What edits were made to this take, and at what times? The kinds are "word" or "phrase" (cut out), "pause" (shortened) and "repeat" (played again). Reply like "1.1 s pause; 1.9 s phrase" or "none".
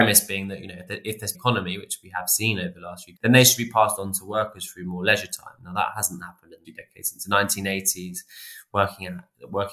1.3 s phrase; 3.2 s word; 6.6 s word